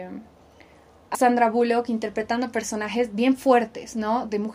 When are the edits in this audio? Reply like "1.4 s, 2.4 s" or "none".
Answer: 1.1 s